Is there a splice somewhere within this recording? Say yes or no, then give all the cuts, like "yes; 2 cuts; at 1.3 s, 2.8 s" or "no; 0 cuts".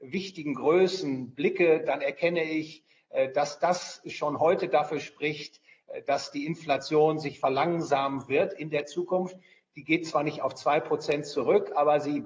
no; 0 cuts